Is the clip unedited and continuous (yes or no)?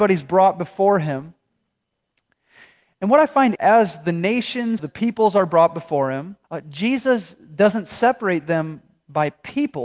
no